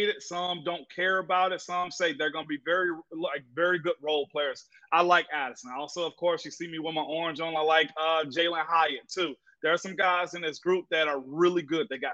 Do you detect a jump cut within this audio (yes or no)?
no